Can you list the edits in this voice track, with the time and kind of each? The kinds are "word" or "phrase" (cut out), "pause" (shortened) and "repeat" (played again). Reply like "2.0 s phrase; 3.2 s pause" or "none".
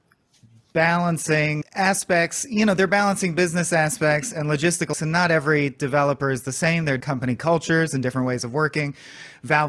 1.6 s word; 4.9 s word; 7.0 s word